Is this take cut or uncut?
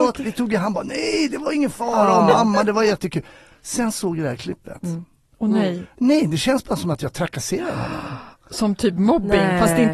uncut